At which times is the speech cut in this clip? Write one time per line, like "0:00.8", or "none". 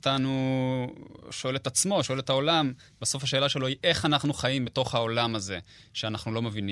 none